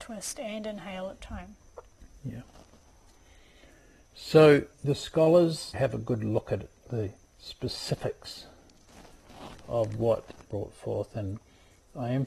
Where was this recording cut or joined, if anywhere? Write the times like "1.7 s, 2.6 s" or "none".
1.2 s, 4.7 s, 5.7 s, 7.2 s, 10.5 s